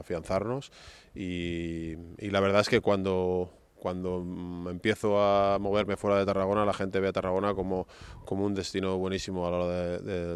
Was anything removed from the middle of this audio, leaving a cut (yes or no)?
no